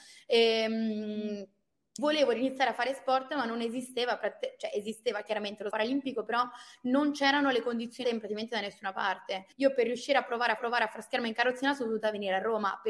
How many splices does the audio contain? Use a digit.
5